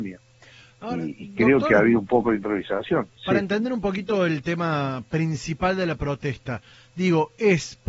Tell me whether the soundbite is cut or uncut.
uncut